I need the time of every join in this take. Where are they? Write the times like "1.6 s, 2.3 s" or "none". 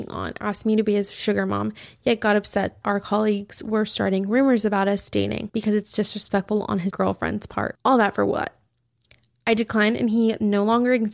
2.8 s, 6.9 s